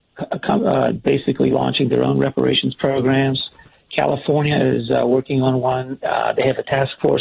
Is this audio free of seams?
yes; 0 cuts

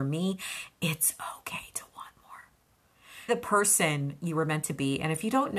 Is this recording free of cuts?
no; 1 cut; at 3.3 s

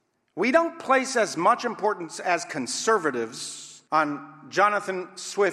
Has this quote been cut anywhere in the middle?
yes; 1 cut; at 3.9 s

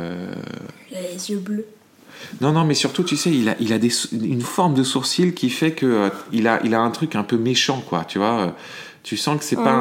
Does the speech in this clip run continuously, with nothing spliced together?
yes; 0 cuts

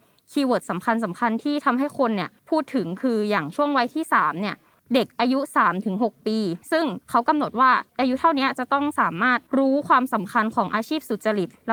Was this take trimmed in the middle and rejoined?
yes; 6 cuts; at 2.4 s, 4.8 s, 6.6 s, 7.0 s, 7.9 s, 9.5 s

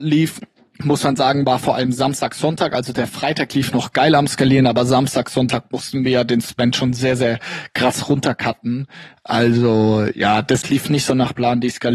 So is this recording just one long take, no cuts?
yes; 0 cuts

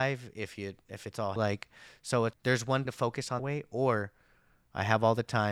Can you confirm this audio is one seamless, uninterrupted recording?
no; 4 cuts; at 1.4 s, 2.3 s, 2.9 s, 3.4 s

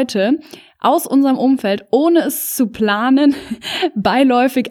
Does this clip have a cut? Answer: no; 0 cuts

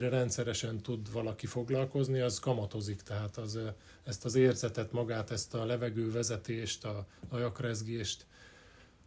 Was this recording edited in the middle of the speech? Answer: no; 0 cuts

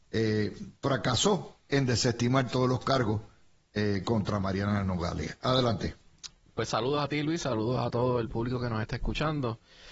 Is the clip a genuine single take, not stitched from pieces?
yes; 0 cuts

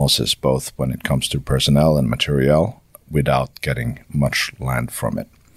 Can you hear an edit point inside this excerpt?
no; 0 cuts

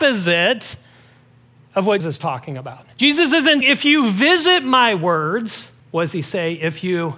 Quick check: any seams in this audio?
yes; 4 cuts; at 2.0 s, 2.9 s, 3.6 s, 5.8 s

